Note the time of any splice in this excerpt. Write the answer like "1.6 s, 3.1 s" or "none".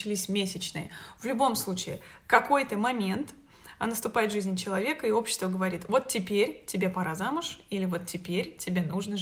none